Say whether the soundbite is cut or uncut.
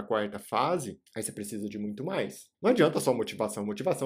cut